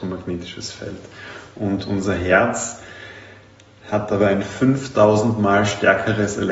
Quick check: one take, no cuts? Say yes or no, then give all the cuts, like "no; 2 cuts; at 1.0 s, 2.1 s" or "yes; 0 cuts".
yes; 0 cuts